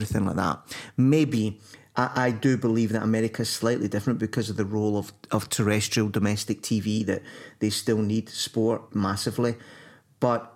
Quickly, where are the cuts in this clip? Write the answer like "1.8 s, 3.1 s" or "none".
none